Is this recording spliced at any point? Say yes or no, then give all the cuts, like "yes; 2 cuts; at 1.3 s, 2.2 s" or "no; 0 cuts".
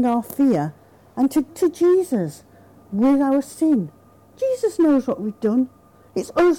yes; 2 cuts; at 1.5 s, 4.1 s